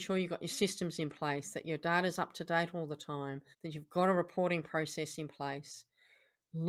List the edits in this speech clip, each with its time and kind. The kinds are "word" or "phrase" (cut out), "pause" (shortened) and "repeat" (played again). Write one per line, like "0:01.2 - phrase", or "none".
0:03.5 - pause